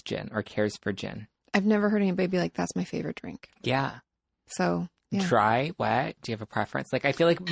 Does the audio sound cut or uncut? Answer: uncut